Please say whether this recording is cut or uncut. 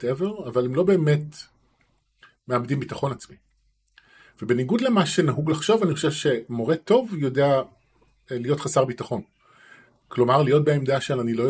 uncut